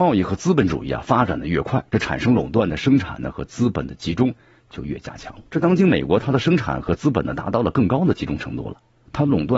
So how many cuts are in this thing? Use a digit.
1